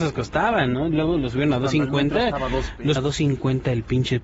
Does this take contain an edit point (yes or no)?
yes